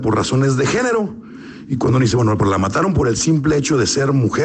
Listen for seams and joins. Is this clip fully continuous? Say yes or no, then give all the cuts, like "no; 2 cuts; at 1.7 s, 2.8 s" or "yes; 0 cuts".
yes; 0 cuts